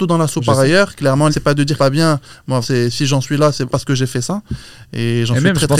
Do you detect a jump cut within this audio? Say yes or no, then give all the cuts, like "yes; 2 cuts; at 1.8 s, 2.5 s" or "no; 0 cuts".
yes; 4 cuts; at 1.3 s, 1.8 s, 2.6 s, 3.7 s